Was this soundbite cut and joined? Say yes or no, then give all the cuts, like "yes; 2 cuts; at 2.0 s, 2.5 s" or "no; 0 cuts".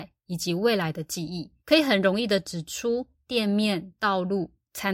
yes; 1 cut; at 1.6 s